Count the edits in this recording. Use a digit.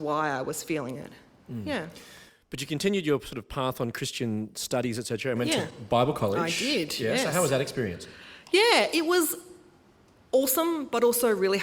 0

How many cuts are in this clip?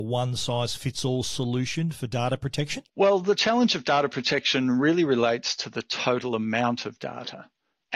1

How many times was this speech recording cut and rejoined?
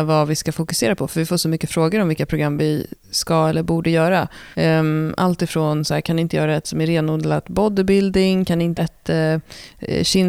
2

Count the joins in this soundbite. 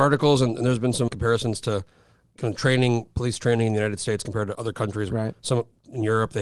3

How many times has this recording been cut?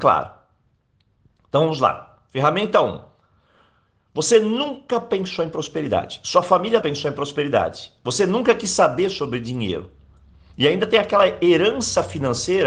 1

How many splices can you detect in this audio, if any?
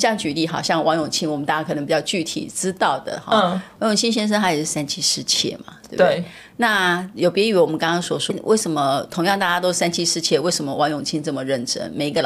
1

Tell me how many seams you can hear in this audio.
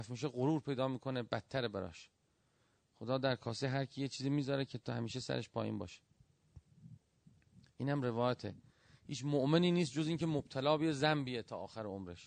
0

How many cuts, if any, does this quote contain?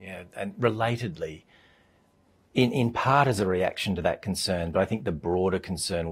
0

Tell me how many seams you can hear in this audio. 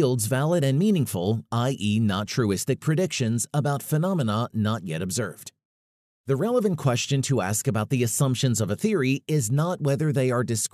0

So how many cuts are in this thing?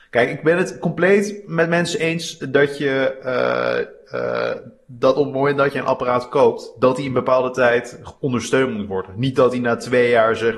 0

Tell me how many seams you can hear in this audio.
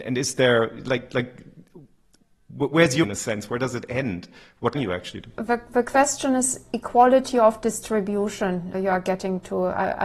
4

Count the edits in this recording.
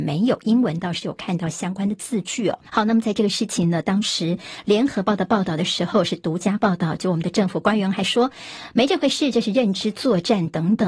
1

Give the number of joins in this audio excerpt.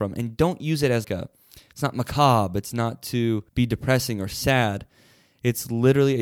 2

